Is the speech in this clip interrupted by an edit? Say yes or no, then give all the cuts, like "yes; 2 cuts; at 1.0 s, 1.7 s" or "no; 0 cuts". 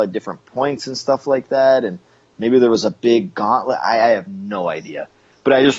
no; 0 cuts